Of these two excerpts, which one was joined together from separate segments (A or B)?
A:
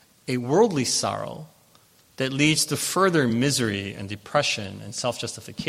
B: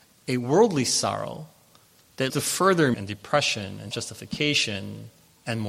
B